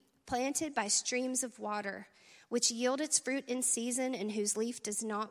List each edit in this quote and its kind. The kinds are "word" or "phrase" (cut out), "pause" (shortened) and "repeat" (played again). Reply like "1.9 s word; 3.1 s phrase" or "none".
none

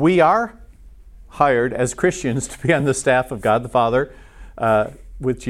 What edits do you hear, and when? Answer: none

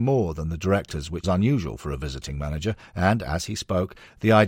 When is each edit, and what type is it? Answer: 1.2 s word

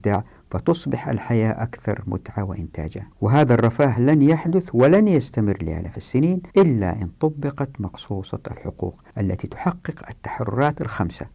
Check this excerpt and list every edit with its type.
3.1 s pause; 6.5 s pause; 9.1 s pause

